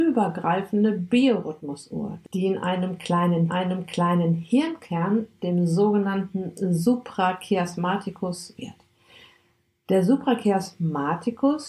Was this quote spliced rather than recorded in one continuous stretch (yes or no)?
yes